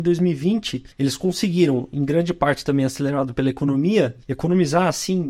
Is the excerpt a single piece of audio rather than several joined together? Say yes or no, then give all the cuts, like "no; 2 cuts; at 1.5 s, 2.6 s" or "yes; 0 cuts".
no; 2 cuts; at 0.9 s, 4.2 s